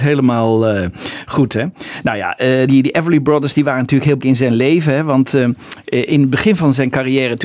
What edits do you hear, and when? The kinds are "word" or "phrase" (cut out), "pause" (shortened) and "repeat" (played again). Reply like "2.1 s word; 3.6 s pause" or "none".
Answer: 2.7 s word; 4.2 s word